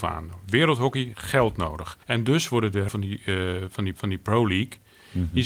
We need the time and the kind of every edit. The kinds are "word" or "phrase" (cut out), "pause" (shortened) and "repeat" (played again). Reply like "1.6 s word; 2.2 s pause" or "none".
1.1 s word; 2.0 s pause; 2.9 s word; 3.9 s repeat